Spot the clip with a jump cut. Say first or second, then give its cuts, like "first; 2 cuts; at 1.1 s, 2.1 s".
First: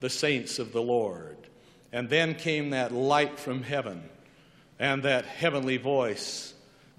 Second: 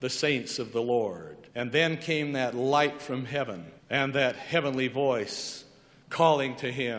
second; 2 cuts; at 1.5 s, 3.8 s